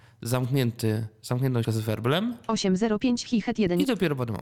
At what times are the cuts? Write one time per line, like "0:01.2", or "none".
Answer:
0:01.6